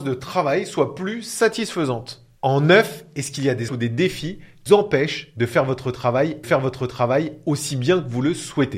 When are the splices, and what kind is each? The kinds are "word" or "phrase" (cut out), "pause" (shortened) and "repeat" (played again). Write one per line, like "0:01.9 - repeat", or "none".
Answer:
0:03.7 - word
0:04.7 - word
0:06.4 - repeat

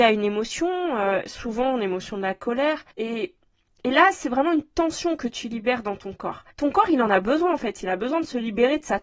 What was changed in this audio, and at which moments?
0:02.9 - pause
0:06.5 - pause

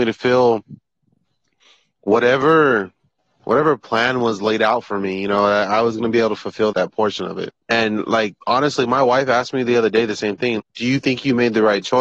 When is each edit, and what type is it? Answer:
0:03.2 - pause
0:06.7 - word
0:07.6 - pause
0:08.4 - pause
0:10.6 - word

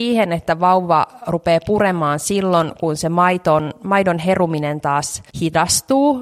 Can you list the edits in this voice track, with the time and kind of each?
0:05.3 - pause

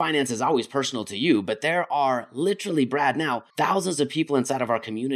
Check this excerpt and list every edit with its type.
0:03.5 - pause

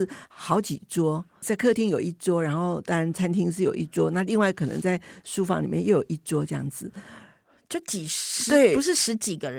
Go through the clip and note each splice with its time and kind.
0:01.4 - word

